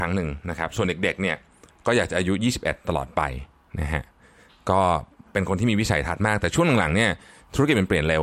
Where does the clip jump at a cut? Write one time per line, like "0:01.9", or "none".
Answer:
none